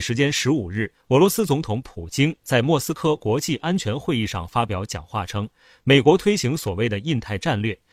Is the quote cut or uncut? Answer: uncut